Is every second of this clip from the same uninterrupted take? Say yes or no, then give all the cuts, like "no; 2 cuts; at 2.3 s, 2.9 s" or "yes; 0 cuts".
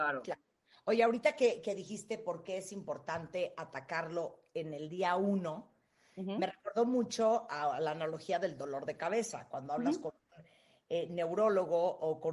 yes; 0 cuts